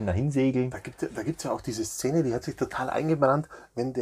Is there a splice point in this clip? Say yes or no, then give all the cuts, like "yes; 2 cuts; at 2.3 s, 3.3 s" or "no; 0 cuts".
no; 0 cuts